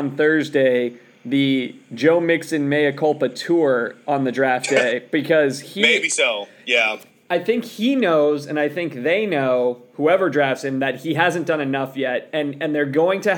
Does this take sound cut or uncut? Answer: uncut